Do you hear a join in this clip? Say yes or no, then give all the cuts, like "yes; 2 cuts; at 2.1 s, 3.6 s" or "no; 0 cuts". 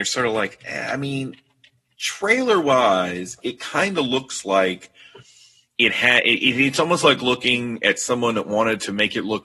no; 0 cuts